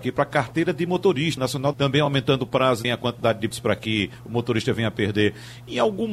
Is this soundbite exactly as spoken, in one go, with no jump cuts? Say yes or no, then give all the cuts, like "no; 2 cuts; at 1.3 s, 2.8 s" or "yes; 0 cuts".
no; 4 cuts; at 1.4 s, 1.7 s, 2.8 s, 3.5 s